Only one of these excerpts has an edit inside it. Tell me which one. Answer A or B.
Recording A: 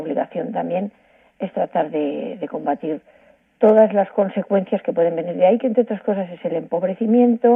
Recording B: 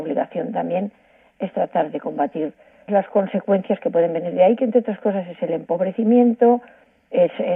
B